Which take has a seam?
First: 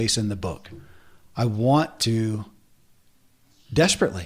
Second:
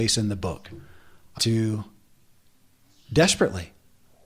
second; 1 cut; at 1.4 s

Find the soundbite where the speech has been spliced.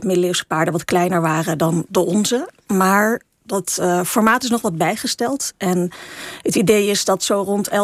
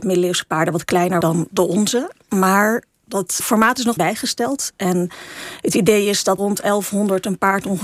second; 4 cuts; at 1.2 s, 3.4 s, 4.0 s, 6.4 s

